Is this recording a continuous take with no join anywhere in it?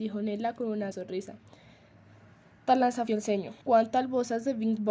no; 3 cuts; at 0.9 s, 3.1 s, 3.6 s

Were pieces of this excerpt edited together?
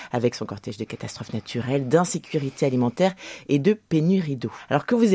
no; 0 cuts

